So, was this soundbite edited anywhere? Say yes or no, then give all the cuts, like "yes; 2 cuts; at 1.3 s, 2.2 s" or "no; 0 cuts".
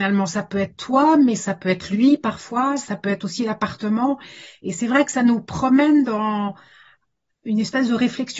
no; 0 cuts